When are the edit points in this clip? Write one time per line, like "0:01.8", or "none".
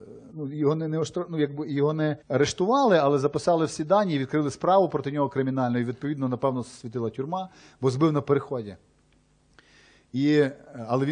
0:02.2